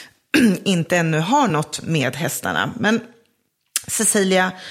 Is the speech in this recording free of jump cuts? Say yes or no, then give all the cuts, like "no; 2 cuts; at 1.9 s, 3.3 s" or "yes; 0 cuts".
yes; 0 cuts